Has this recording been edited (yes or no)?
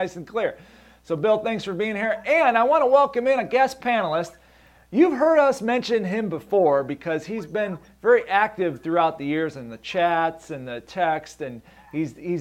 no